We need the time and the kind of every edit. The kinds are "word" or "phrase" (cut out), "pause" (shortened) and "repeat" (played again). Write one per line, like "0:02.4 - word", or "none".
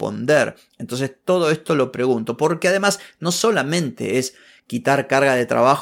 none